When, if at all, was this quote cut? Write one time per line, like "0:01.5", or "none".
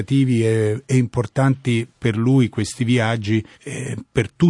0:03.5